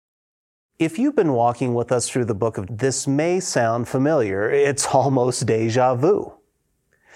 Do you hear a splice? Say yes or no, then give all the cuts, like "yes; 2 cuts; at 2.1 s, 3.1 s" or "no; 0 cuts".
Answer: yes; 1 cut; at 2.7 s